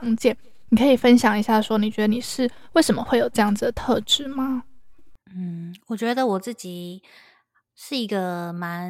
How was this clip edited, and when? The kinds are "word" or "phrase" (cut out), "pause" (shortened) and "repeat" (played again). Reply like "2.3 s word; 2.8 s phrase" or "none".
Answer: 5.2 s pause; 7.5 s word